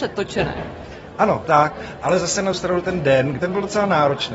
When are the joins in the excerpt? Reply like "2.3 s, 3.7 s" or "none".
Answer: 1.4 s, 2.5 s, 3.4 s